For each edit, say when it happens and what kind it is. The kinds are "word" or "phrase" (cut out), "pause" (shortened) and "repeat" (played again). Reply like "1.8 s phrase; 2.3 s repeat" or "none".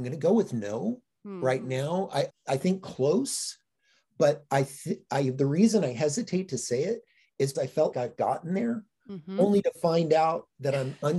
2.3 s word; 7.5 s word; 7.9 s word

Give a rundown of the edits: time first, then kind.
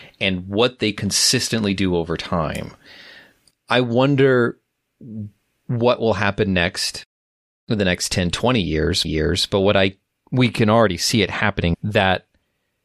9.0 s repeat; 11.7 s word

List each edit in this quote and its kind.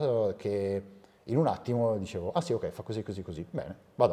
none

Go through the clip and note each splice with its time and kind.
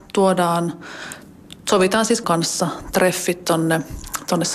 2.2 s phrase

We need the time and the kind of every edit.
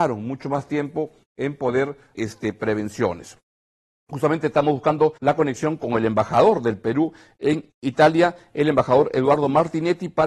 2.1 s phrase; 5.2 s pause

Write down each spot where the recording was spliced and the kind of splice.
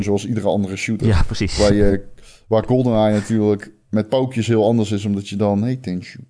none

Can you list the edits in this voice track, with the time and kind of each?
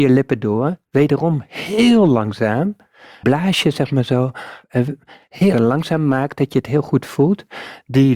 3.2 s word; 4.6 s pause; 5.5 s word

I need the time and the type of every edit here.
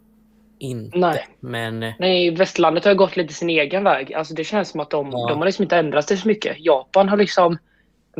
1.3 s pause

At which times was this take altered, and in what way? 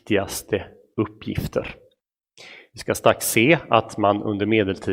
none

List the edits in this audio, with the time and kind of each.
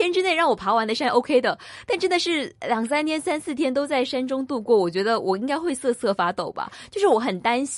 none

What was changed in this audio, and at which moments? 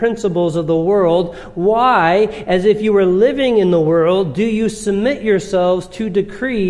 none

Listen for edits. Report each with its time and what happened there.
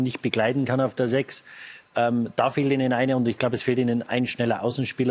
none

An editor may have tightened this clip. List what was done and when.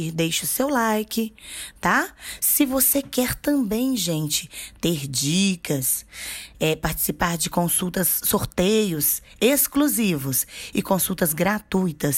none

